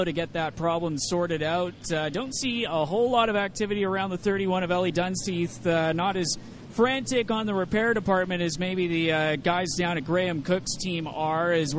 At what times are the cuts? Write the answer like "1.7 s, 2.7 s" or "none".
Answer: none